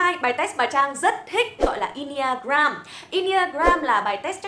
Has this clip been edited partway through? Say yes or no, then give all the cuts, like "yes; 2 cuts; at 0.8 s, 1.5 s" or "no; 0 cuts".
yes; 1 cut; at 1.6 s